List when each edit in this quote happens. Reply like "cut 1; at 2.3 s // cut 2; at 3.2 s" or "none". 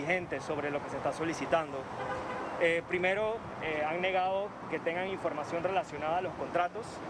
none